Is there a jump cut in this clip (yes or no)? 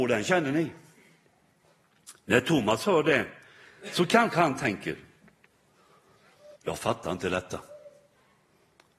yes